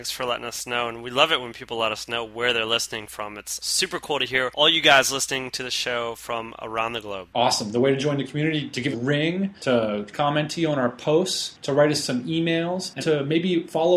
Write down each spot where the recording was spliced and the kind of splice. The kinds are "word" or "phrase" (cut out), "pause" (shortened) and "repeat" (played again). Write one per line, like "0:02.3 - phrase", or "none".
0:08.9 - phrase
0:10.1 - word
0:13.0 - word